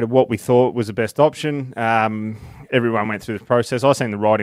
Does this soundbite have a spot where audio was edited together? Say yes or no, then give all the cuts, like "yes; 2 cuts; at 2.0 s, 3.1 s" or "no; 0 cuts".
no; 0 cuts